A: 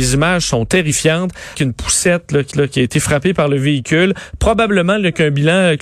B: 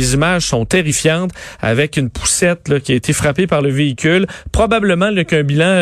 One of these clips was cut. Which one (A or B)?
A